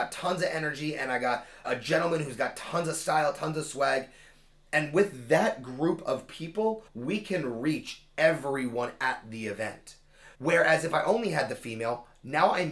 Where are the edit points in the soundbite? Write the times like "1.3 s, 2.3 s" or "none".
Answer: 1.6 s, 6.9 s, 10.3 s